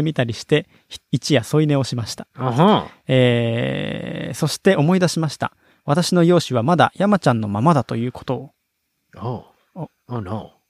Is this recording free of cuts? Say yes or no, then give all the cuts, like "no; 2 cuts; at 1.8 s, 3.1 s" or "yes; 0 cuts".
yes; 0 cuts